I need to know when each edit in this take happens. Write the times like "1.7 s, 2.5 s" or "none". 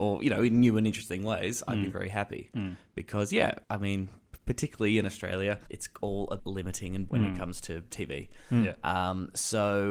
1.9 s, 3.6 s, 5.7 s, 6.4 s, 7.1 s, 7.9 s